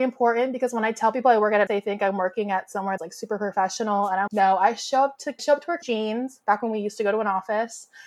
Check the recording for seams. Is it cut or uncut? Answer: cut